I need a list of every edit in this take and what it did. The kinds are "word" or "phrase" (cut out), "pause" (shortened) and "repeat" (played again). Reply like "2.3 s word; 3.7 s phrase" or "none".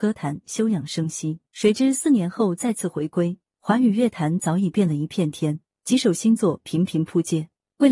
1.5 s pause